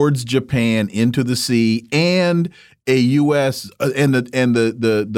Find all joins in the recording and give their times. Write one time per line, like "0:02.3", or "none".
none